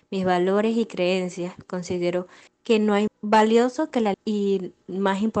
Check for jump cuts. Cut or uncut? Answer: cut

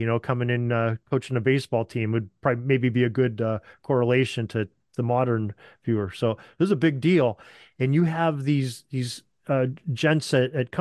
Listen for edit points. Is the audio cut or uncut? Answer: uncut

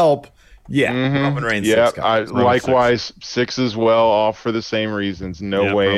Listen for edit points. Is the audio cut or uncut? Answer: uncut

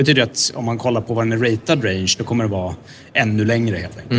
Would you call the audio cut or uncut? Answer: uncut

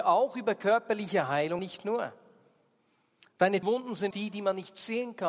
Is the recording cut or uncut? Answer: cut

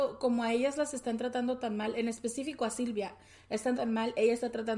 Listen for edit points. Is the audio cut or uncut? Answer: cut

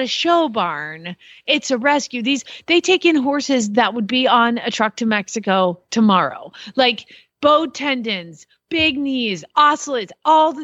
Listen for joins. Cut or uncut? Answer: uncut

